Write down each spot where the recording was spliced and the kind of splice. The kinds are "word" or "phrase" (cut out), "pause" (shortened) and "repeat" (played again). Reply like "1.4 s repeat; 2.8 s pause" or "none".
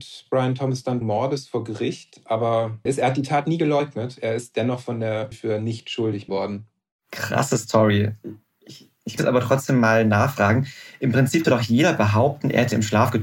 1.0 s word; 2.9 s word; 5.3 s word; 6.3 s word; 9.2 s word; 11.4 s word